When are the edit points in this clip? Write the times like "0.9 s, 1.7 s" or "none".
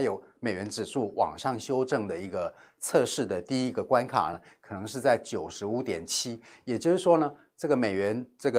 none